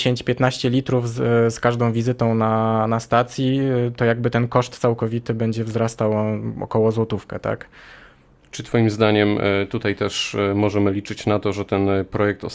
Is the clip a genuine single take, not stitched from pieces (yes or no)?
yes